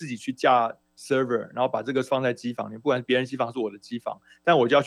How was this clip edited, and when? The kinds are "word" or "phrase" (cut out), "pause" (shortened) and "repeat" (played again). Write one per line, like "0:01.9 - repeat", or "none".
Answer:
0:02.1 - word